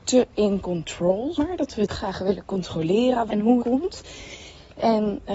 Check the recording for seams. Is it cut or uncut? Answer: cut